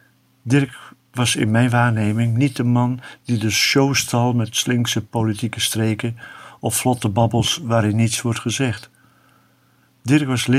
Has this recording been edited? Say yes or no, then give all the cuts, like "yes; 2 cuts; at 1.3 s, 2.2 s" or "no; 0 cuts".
no; 0 cuts